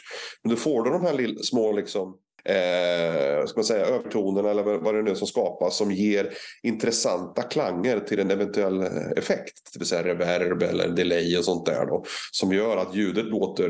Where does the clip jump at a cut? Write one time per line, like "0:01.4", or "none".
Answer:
none